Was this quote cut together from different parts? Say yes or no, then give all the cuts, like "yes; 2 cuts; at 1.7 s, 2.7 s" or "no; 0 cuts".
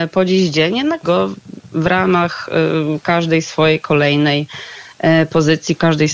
yes; 1 cut; at 1.0 s